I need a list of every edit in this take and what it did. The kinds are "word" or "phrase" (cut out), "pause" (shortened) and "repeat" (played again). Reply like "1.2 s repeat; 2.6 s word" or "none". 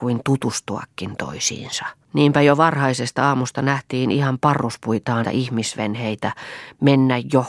2.0 s pause; 5.2 s phrase

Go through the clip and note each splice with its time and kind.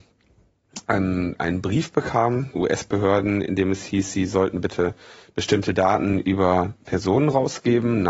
2.5 s word

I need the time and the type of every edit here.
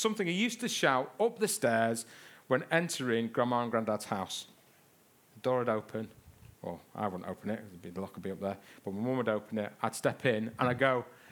6.5 s pause

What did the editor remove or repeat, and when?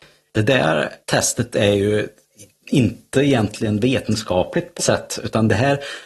1.0 s pause; 4.8 s word

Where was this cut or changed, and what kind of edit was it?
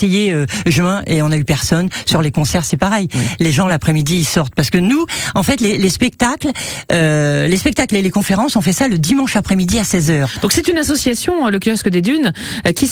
none

